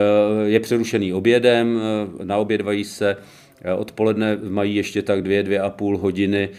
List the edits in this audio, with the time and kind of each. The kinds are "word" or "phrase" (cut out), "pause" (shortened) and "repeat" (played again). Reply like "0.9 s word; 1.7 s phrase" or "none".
none